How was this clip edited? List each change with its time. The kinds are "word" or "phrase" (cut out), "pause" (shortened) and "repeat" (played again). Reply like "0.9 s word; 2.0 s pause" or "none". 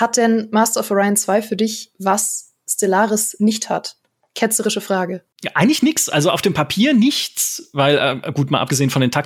5.3 s pause